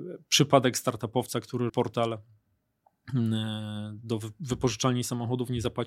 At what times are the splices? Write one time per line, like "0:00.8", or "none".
0:01.7